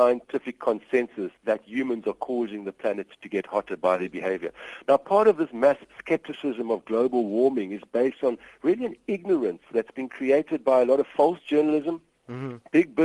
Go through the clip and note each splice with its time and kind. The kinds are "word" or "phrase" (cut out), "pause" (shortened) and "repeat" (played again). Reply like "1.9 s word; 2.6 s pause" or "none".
1.3 s pause